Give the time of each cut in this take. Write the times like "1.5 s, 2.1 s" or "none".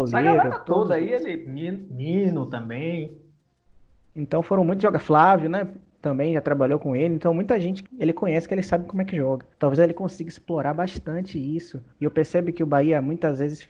7.9 s, 9.5 s, 11.9 s